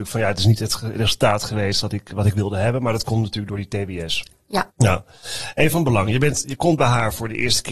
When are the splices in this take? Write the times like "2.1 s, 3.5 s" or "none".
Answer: 4.7 s